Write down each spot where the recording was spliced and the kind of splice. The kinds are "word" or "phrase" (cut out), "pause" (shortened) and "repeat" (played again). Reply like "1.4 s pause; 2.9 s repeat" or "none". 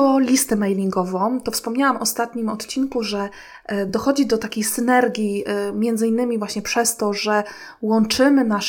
none